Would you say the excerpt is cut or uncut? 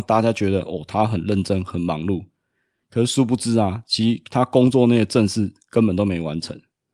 uncut